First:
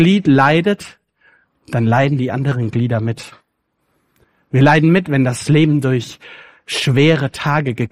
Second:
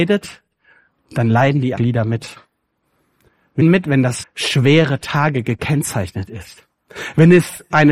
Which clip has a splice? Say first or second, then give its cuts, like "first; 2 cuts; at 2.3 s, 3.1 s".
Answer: second; 3 cuts; at 1.8 s, 3.6 s, 4.2 s